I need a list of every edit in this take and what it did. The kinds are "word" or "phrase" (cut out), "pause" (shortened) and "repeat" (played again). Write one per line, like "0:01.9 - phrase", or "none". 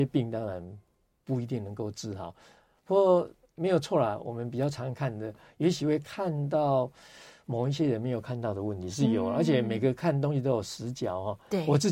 none